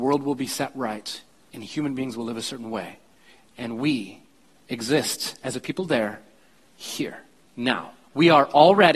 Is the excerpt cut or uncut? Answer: cut